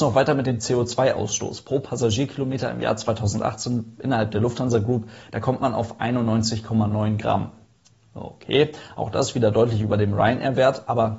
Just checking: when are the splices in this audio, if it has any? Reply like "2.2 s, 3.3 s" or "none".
7.7 s

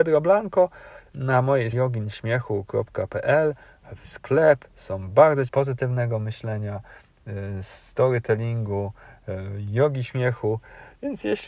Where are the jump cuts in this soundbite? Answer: 1.1 s, 1.7 s, 4.0 s, 4.7 s, 5.5 s

